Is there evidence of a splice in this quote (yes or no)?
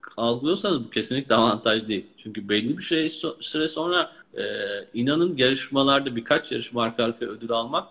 yes